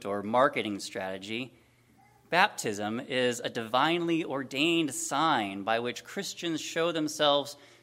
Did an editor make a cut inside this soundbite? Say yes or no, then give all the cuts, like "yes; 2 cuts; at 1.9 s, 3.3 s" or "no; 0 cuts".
no; 0 cuts